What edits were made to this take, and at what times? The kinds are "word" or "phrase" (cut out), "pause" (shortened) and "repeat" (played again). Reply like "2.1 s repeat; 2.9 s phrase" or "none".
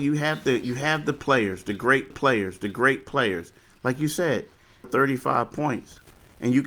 2.1 s repeat; 4.8 s phrase